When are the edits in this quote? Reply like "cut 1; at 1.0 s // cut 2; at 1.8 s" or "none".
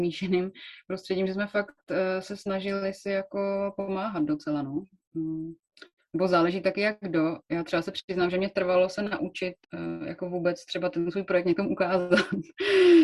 cut 1; at 9.6 s